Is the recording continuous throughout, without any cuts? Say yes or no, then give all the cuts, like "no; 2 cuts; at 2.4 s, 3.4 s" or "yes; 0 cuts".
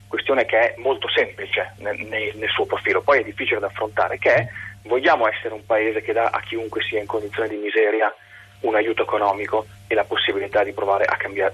yes; 0 cuts